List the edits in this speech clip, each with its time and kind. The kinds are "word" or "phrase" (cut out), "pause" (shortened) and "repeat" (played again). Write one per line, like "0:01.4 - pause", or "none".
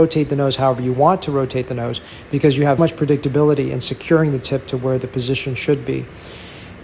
0:02.8 - word